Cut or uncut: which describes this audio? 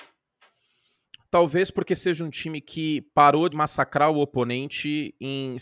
cut